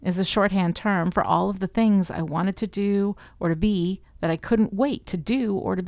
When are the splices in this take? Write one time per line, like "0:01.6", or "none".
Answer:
none